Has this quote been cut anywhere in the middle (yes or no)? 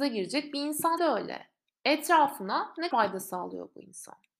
yes